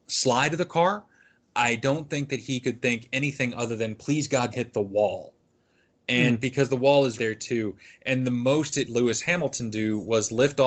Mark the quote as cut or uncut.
cut